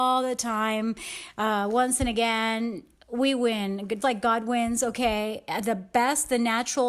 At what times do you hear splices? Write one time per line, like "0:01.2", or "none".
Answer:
0:04.0